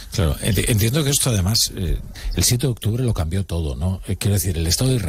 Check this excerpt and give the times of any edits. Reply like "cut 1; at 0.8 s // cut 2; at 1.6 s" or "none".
none